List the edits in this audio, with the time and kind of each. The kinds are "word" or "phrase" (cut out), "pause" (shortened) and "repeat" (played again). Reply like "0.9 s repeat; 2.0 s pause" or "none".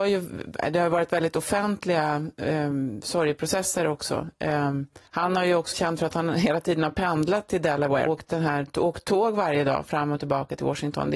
5.1 s pause; 5.7 s word; 8.1 s word